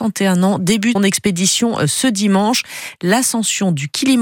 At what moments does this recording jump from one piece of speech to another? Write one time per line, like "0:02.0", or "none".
0:01.0